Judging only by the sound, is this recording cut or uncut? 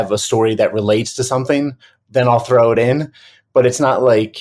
uncut